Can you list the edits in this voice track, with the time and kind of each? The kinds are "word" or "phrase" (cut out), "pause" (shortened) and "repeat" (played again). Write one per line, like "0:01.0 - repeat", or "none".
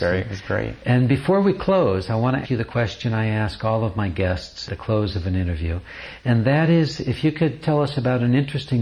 0:02.4 - word
0:04.7 - word
0:07.6 - word